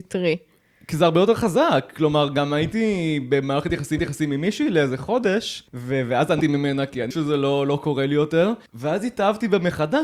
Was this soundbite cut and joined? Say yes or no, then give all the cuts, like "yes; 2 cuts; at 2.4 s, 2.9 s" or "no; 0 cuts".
yes; 5 cuts; at 4.0 s, 5.7 s, 6.4 s, 7.1 s, 8.7 s